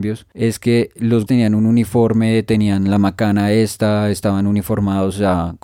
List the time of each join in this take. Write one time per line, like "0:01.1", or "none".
0:01.3